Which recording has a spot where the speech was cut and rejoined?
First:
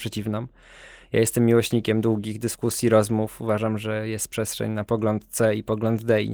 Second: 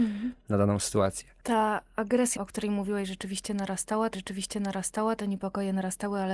second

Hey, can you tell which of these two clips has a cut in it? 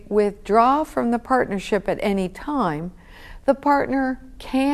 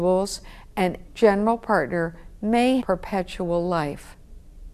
second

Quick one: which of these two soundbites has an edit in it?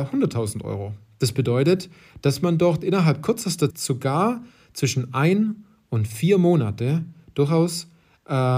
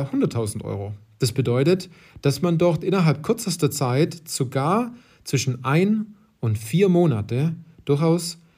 first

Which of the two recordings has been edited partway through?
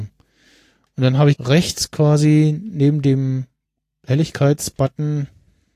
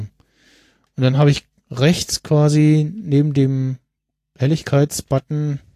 first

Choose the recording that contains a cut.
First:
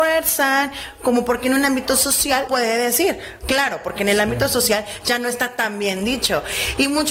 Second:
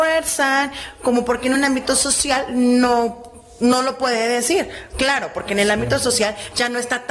first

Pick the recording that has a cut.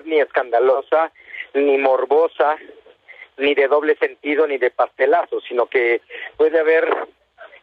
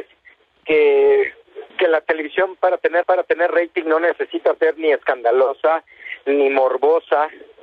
second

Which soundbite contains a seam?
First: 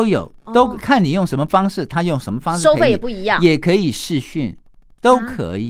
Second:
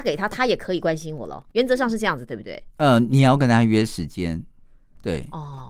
second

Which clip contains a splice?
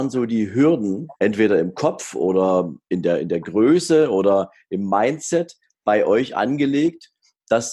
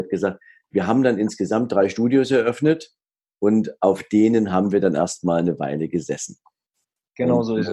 first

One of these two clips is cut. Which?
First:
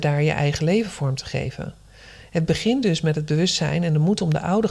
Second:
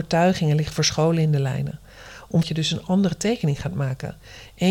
second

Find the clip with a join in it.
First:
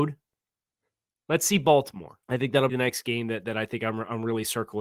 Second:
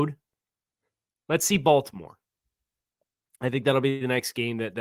first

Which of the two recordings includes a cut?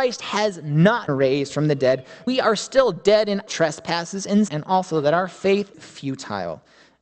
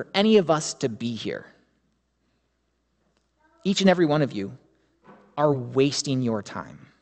first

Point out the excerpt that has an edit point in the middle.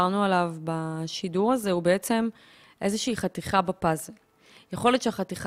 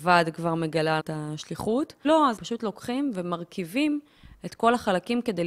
second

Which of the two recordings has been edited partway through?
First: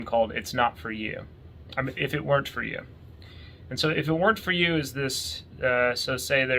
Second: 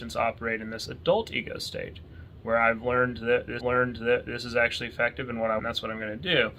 second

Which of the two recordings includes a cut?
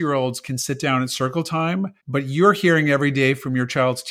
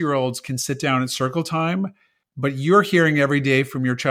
first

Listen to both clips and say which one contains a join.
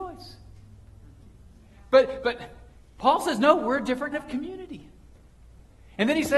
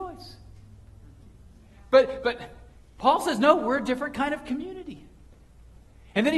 first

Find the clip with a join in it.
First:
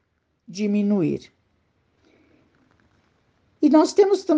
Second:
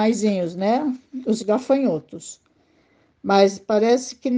second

